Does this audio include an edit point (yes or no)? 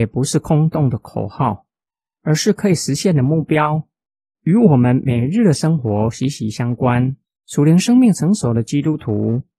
yes